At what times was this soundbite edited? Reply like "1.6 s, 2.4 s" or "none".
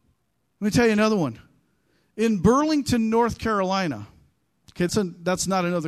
4.9 s